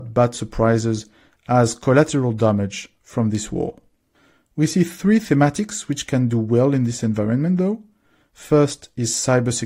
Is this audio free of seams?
yes; 0 cuts

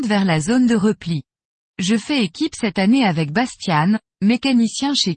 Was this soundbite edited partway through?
no; 0 cuts

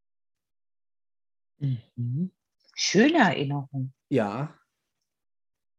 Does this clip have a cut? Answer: yes; 2 cuts; at 2.5 s, 4.0 s

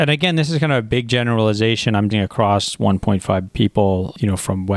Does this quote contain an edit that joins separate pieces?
yes; 2 cuts; at 2.1 s, 3.5 s

